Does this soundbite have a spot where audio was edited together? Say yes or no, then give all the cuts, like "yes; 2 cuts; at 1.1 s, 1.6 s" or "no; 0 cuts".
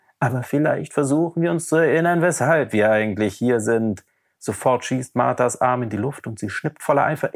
no; 0 cuts